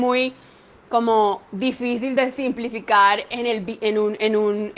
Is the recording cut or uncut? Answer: uncut